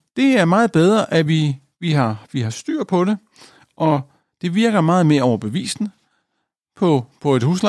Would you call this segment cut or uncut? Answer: uncut